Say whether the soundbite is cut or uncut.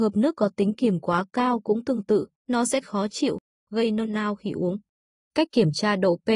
cut